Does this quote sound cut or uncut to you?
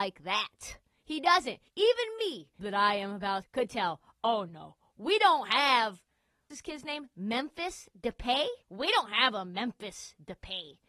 cut